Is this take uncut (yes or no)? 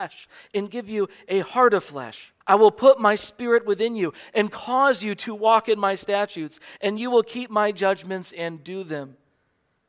no